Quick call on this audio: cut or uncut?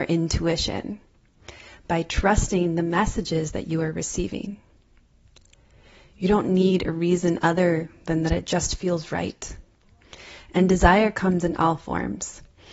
uncut